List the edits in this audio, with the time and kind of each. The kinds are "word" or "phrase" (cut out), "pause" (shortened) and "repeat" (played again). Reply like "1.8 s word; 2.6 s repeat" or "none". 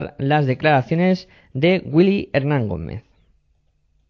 none